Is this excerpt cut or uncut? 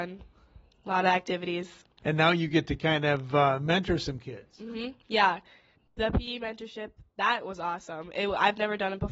uncut